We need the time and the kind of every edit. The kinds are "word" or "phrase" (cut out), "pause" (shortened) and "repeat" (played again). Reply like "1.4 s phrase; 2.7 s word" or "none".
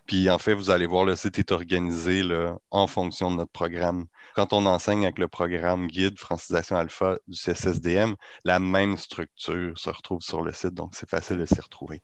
4.3 s word